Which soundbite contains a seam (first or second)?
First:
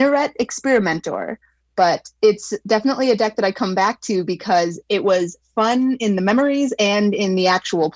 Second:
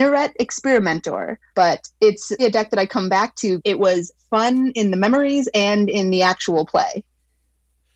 second